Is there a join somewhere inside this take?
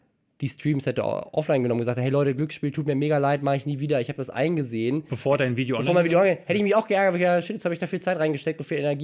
no; 0 cuts

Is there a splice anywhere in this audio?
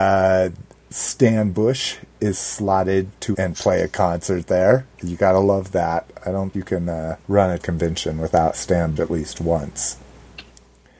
yes; 6 cuts; at 3.3 s, 6.5 s, 7.2 s, 7.6 s, 8.5 s, 9.0 s

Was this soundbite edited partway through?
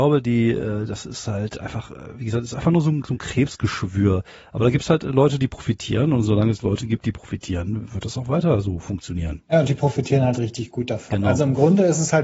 no; 0 cuts

